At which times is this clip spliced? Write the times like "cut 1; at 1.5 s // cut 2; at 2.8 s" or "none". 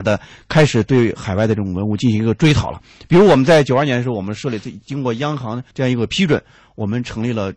cut 1; at 5.7 s